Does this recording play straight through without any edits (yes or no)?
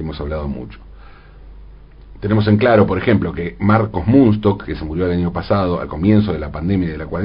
yes